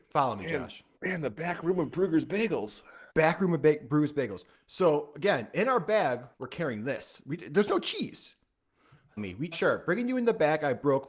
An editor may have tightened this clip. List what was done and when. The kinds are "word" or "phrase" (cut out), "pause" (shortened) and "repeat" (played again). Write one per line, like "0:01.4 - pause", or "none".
0:01.0 - pause
0:03.1 - pause
0:04.5 - pause
0:06.3 - pause
0:09.2 - phrase
0:09.5 - word